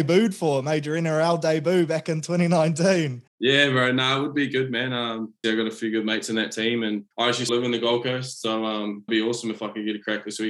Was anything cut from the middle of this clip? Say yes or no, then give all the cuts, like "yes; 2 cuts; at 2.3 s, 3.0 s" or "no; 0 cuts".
yes; 5 cuts; at 3.3 s, 5.4 s, 7.1 s, 7.5 s, 9.1 s